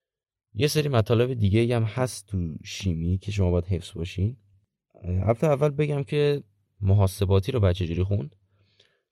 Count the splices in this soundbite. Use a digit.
0